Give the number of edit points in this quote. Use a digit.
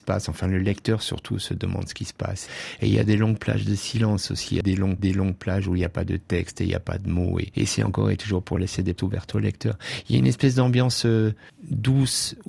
2